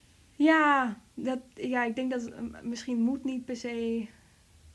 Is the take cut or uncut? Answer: uncut